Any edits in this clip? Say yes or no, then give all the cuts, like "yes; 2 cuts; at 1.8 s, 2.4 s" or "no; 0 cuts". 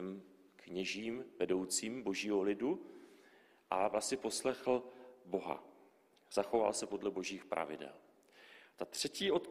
no; 0 cuts